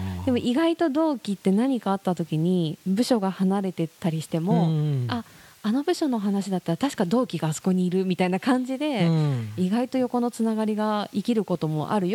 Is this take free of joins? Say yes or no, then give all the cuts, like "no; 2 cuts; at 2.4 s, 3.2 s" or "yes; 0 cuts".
yes; 0 cuts